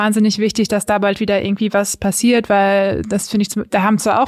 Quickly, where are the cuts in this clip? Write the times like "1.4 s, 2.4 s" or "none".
none